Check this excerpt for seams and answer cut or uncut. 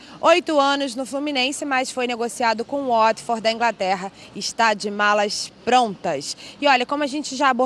uncut